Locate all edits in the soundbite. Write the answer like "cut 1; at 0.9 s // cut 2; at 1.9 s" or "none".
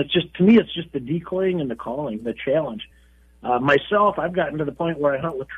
none